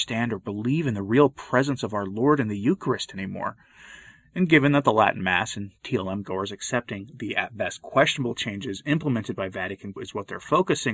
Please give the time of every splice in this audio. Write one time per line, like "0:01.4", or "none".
0:10.0